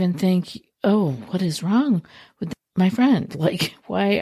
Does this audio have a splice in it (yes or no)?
no